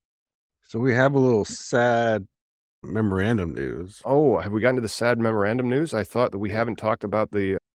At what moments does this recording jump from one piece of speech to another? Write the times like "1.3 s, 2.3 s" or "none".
none